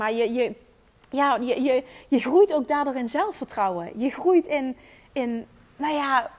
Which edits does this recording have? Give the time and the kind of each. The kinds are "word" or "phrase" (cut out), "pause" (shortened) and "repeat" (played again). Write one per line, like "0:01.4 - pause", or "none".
none